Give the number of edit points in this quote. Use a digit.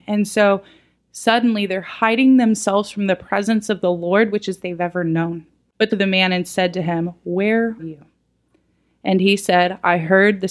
3